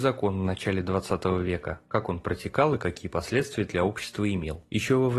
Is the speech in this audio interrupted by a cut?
no; 0 cuts

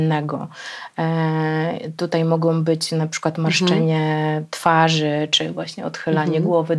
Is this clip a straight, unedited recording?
yes; 0 cuts

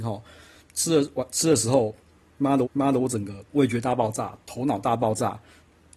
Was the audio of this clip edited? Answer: yes; 2 cuts; at 2.6 s, 3.5 s

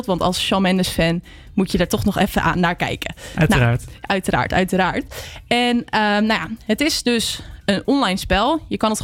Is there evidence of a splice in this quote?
no; 0 cuts

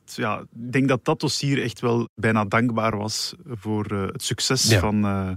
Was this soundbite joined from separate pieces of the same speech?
no; 0 cuts

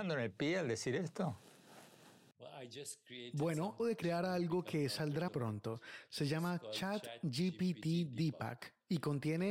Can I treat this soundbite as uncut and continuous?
no; 2 cuts; at 3.8 s, 5.3 s

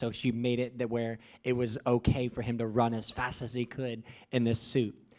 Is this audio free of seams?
yes; 0 cuts

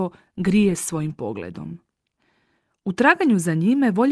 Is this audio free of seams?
yes; 0 cuts

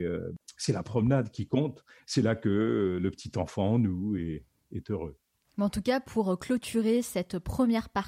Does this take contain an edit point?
no; 0 cuts

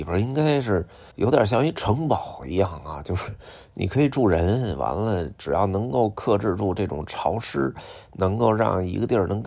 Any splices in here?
yes; 1 cut; at 1.1 s

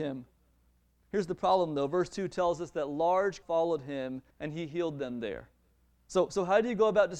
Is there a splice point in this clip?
yes; 2 cuts; at 3.4 s, 4.3 s

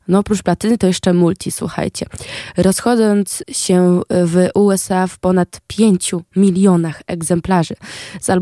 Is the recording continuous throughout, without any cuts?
no; 1 cut; at 3.4 s

